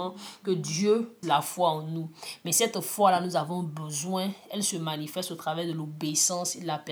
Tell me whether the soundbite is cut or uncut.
cut